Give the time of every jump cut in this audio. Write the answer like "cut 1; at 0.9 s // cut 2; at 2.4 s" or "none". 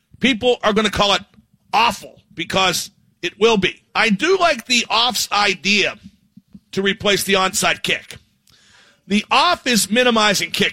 cut 1; at 2.3 s // cut 2; at 3.9 s